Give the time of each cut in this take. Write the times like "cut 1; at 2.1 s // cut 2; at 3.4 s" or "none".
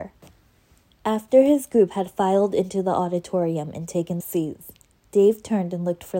cut 1; at 4.2 s